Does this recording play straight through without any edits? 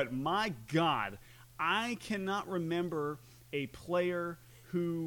yes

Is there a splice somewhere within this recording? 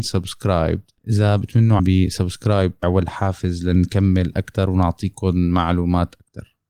yes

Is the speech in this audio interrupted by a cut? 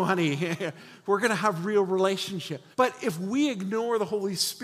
yes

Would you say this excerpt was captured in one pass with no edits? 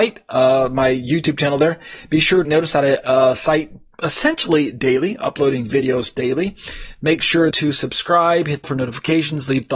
no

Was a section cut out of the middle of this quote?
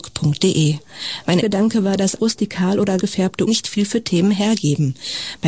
yes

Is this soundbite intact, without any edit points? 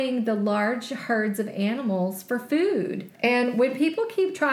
no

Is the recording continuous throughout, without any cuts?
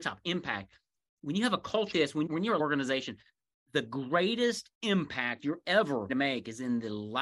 no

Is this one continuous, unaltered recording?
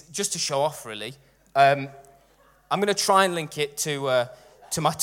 yes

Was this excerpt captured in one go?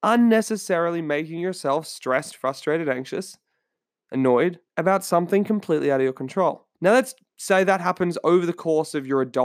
no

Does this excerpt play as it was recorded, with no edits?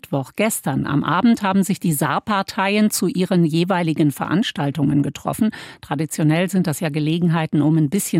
yes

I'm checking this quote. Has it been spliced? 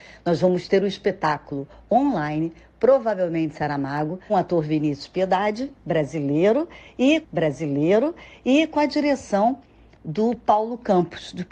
yes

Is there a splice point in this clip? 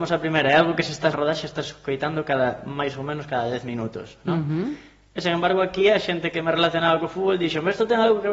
yes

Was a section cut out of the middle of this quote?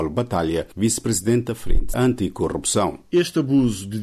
yes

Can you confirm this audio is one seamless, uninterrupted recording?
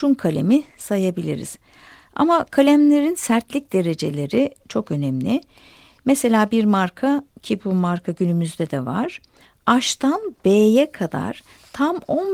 yes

